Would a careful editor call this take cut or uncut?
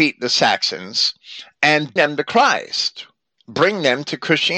cut